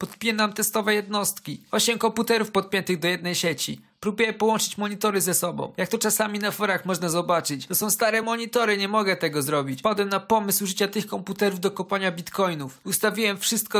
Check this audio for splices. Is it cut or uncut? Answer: uncut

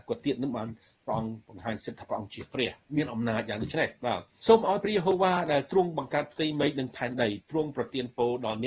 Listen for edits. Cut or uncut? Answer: cut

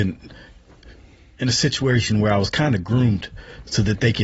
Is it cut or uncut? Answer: uncut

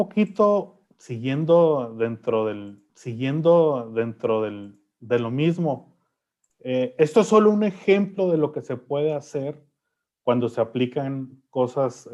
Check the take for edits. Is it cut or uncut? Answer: cut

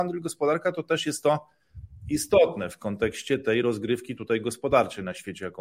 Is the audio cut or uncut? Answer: uncut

